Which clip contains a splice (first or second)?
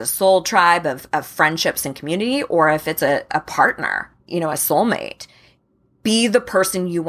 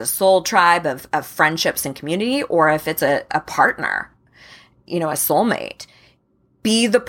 first